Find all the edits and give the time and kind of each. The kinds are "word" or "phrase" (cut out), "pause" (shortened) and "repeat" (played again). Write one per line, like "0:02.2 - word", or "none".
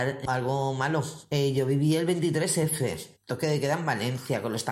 0:03.2 - pause